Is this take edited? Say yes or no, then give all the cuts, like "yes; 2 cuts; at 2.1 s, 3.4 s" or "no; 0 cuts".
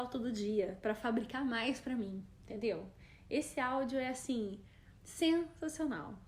yes; 1 cut; at 5.0 s